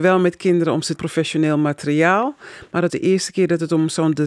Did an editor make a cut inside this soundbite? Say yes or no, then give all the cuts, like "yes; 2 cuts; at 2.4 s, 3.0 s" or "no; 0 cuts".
yes; 2 cuts; at 1.0 s, 2.9 s